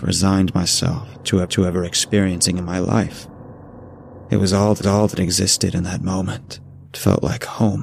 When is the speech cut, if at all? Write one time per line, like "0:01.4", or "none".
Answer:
0:01.4
0:04.8
0:06.8